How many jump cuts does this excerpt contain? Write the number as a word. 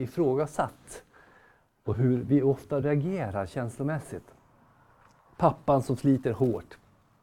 zero